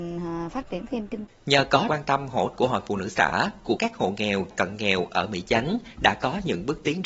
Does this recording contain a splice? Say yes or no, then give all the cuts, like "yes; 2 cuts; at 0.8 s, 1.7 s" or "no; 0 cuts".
yes; 5 cuts; at 1.3 s, 1.9 s, 2.5 s, 3.8 s, 4.5 s